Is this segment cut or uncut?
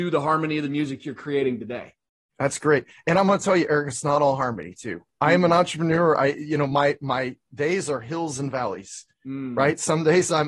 uncut